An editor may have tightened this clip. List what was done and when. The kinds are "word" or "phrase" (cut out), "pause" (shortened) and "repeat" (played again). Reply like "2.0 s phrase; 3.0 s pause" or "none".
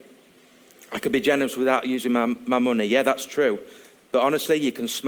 none